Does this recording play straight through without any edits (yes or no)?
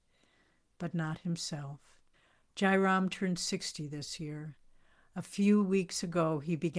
no